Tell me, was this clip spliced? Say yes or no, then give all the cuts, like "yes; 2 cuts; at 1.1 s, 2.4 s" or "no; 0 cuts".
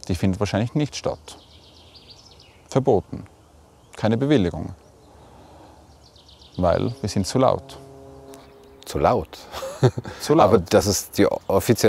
no; 0 cuts